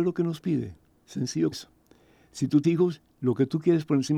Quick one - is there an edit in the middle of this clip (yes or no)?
yes